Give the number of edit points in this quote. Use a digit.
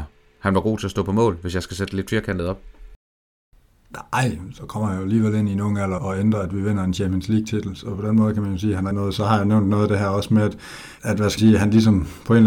4